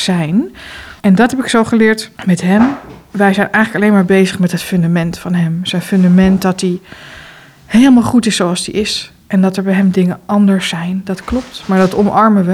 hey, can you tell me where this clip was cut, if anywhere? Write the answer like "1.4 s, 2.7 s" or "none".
1.0 s, 2.1 s